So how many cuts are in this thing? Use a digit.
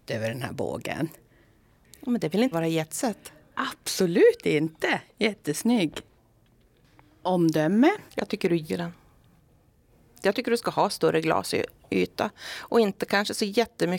3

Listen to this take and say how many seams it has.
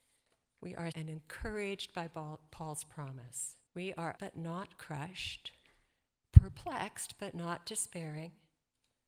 3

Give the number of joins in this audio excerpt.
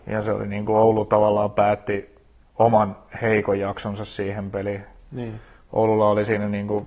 1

